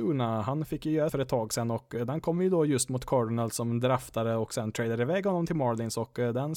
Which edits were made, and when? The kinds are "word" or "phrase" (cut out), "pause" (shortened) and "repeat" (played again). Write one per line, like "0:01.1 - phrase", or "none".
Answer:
0:01.1 - phrase